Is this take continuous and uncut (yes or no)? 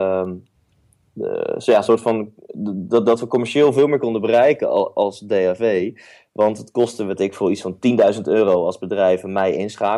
yes